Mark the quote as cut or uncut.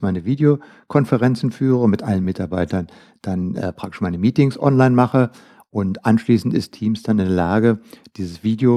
uncut